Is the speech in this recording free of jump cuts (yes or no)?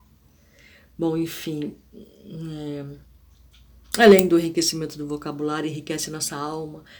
yes